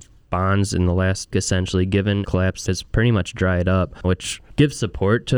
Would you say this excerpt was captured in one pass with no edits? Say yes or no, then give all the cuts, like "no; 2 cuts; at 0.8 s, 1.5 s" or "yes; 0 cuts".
no; 4 cuts; at 1.3 s, 2.2 s, 2.7 s, 4.0 s